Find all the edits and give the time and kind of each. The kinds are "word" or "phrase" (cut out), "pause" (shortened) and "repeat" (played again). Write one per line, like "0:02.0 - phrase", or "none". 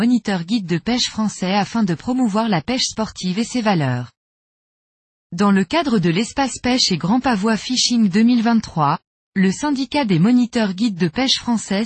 none

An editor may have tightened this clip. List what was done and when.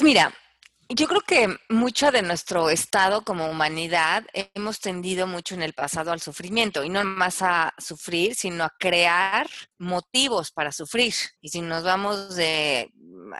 0:07.0 - word
0:09.7 - pause
0:11.4 - pause

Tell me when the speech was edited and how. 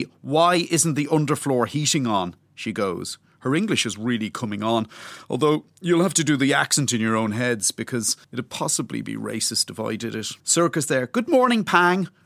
0:08.2 - pause
0:10.4 - pause

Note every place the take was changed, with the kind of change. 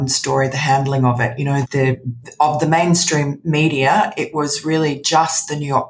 0:01.6 - word

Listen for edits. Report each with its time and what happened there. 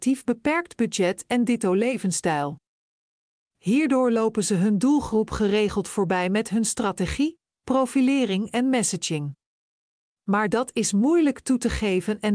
none

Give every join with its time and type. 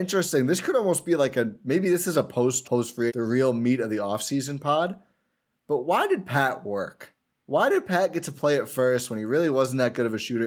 0:02.6 - word
0:03.1 - phrase

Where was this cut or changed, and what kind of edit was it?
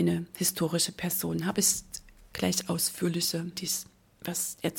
0:02.3 - word
0:03.5 - word

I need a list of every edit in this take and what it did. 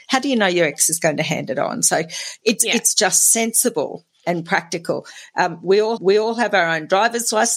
0:02.9 - phrase
0:06.0 - repeat

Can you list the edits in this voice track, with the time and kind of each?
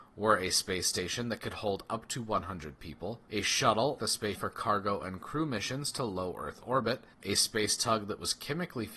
0:03.3 - pause
0:04.0 - word
0:04.3 - word
0:07.1 - pause

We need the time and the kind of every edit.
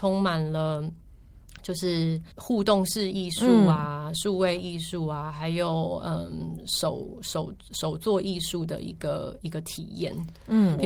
0:02.3 - pause

